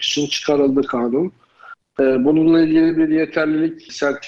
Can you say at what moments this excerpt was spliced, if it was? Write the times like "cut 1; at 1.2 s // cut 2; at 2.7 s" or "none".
none